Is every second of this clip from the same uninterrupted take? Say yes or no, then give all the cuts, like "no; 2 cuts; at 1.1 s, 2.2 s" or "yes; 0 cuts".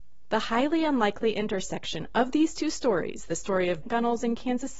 no; 1 cut; at 3.8 s